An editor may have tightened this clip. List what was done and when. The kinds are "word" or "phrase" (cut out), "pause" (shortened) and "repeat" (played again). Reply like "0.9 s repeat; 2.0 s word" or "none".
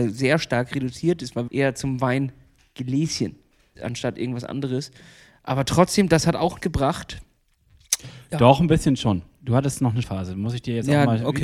1.5 s word; 3.8 s word; 6.6 s word; 10.0 s word